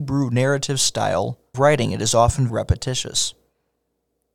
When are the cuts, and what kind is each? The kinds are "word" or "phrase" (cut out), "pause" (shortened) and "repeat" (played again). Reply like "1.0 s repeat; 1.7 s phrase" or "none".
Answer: 1.5 s word; 2.5 s word